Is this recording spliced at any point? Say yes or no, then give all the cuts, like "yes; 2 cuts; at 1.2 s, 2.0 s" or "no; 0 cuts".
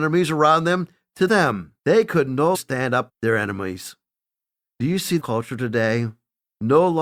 yes; 5 cuts; at 1.3 s, 1.8 s, 2.5 s, 3.1 s, 5.2 s